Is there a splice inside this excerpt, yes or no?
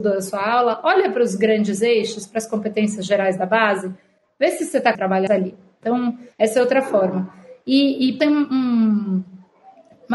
yes